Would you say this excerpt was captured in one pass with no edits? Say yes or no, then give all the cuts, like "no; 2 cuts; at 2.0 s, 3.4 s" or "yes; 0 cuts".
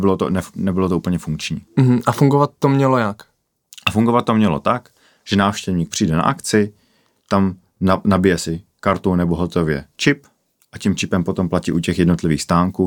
yes; 0 cuts